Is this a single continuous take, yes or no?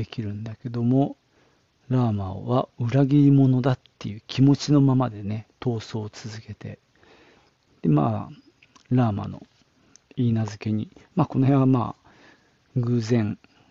yes